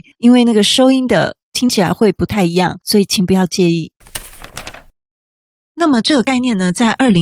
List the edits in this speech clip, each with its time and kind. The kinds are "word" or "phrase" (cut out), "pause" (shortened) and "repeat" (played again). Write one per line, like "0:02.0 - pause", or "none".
none